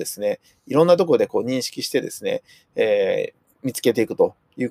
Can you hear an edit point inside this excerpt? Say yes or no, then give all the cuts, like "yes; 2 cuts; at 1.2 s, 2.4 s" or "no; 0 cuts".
no; 0 cuts